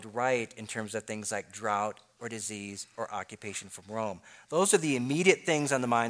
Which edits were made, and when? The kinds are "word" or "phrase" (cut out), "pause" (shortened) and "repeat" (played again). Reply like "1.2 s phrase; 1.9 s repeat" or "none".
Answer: none